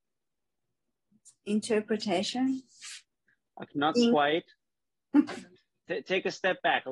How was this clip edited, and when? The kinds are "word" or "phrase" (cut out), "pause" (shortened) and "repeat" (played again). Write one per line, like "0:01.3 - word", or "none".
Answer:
0:01.4 - pause
0:03.7 - word
0:05.6 - pause